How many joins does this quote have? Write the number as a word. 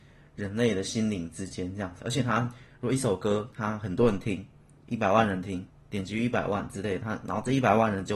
one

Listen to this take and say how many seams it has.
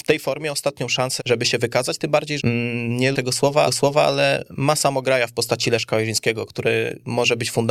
four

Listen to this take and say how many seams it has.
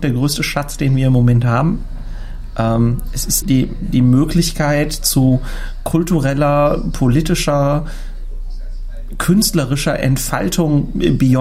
one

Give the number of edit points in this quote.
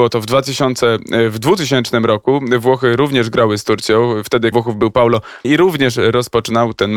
two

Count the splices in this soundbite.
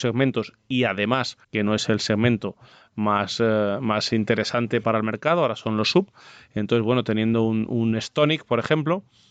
two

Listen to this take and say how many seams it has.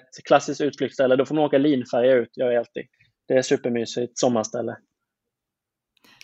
one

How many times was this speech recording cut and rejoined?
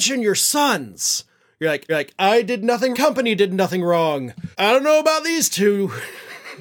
three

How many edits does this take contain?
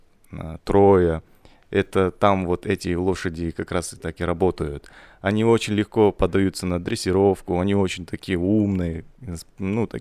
zero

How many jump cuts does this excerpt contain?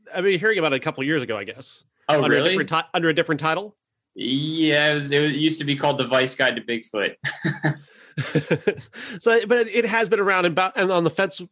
zero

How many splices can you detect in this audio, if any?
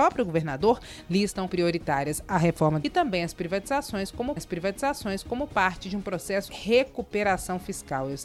four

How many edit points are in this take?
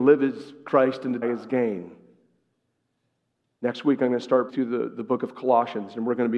two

